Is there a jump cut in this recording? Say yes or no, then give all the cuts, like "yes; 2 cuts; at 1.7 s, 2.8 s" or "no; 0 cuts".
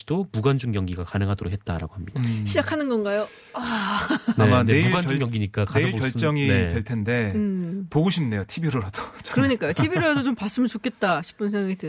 no; 0 cuts